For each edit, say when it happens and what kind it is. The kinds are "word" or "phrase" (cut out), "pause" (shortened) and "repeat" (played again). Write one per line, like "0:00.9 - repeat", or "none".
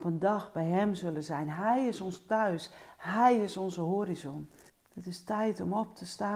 0:04.7 - pause